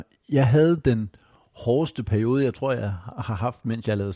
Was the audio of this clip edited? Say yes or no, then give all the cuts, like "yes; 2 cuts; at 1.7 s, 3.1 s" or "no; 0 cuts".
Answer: no; 0 cuts